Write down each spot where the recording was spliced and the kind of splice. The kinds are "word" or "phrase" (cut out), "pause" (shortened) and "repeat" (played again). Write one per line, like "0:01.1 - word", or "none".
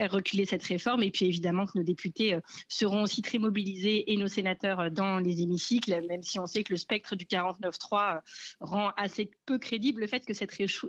none